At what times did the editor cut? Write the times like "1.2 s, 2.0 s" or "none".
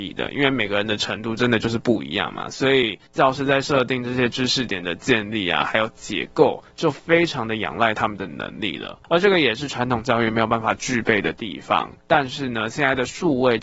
12.0 s